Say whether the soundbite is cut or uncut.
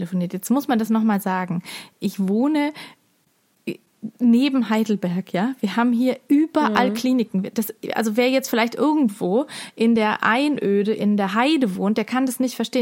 uncut